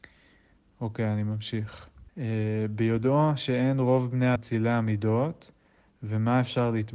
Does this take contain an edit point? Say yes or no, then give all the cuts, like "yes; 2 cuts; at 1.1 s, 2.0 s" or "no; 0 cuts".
yes; 2 cuts; at 2.1 s, 4.4 s